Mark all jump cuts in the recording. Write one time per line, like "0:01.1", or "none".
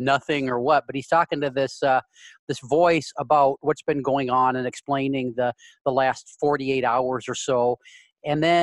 none